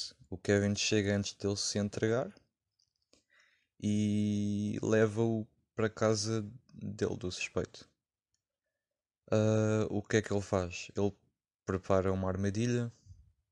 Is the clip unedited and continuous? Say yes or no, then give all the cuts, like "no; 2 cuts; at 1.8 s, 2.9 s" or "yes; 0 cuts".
yes; 0 cuts